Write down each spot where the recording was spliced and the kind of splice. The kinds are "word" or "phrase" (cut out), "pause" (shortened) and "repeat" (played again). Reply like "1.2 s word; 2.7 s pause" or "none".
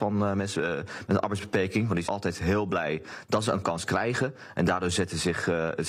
2.0 s word